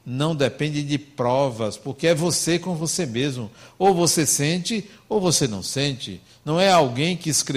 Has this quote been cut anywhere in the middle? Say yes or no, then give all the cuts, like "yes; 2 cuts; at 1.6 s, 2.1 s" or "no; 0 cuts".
no; 0 cuts